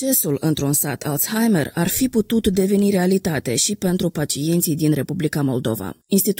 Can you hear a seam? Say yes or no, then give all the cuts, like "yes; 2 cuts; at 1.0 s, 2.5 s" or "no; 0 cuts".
no; 0 cuts